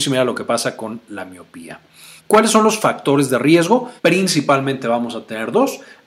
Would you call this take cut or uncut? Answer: cut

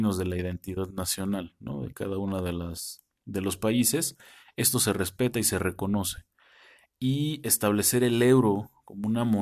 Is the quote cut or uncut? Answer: uncut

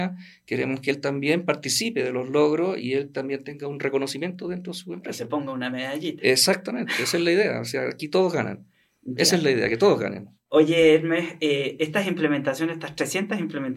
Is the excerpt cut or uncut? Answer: uncut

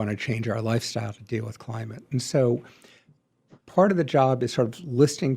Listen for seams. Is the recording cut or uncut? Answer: uncut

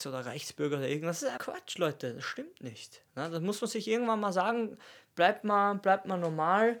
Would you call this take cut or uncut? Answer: cut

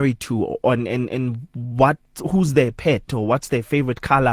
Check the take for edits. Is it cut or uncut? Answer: uncut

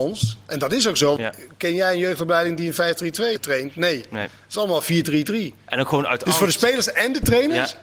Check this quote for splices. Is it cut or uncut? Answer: cut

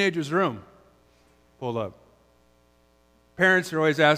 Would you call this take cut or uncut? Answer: uncut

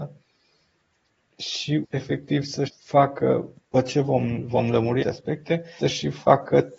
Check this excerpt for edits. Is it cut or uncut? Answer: cut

